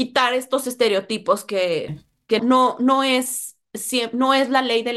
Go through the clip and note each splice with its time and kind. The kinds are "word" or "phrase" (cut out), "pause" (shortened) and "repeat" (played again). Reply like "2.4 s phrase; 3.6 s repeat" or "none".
2.4 s word